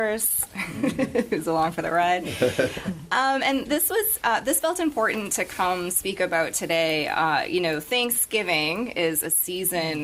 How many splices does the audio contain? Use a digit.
0